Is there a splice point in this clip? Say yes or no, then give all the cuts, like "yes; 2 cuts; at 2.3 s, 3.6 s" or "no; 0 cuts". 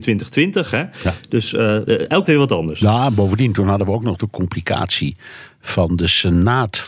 yes; 2 cuts; at 1.9 s, 2.2 s